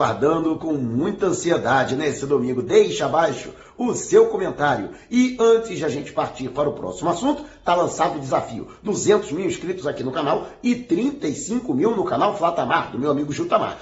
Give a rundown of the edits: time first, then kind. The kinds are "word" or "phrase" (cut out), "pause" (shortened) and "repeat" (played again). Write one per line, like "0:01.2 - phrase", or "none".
none